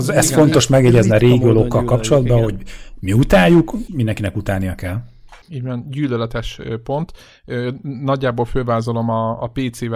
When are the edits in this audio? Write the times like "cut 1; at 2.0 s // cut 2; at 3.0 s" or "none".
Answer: cut 1; at 3.9 s // cut 2; at 5.4 s